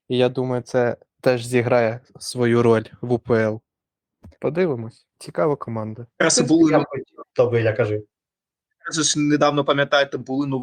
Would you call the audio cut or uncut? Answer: cut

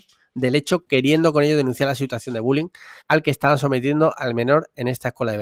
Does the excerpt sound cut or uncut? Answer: cut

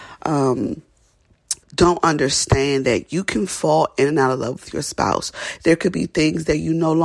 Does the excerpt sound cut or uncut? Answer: cut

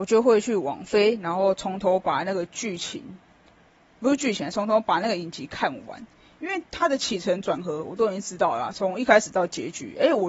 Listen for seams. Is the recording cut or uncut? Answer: cut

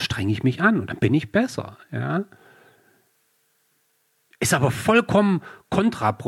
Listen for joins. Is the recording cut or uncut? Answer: uncut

